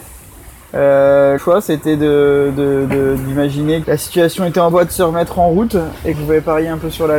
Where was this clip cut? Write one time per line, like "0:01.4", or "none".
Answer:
0:01.4
0:03.8
0:04.7
0:06.1